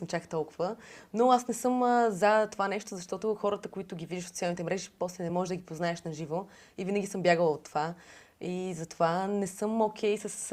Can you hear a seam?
no; 0 cuts

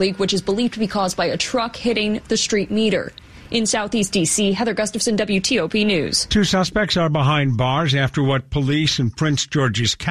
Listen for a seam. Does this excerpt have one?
no; 0 cuts

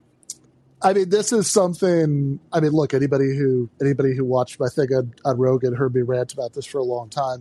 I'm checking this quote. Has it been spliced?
yes; 2 cuts; at 2.5 s, 3.7 s

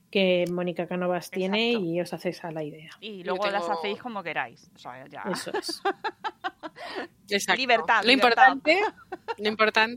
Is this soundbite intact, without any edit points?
yes; 0 cuts

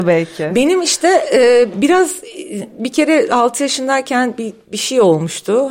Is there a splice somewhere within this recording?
no; 0 cuts

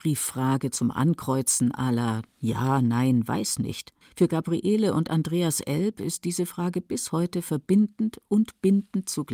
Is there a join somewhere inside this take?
yes; 1 cut; at 4.0 s

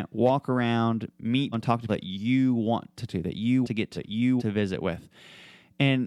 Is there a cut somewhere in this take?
yes; 6 cuts; at 1.5 s, 1.9 s, 3.1 s, 3.6 s, 4.0 s, 4.4 s

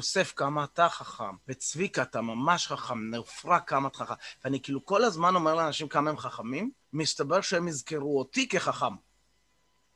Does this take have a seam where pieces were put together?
yes; 2 cuts; at 1.4 s, 6.8 s

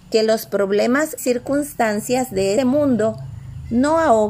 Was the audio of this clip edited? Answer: yes; 2 cuts; at 1.2 s, 2.6 s

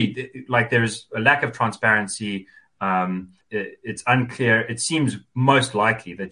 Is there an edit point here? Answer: yes; 1 cut; at 3.4 s

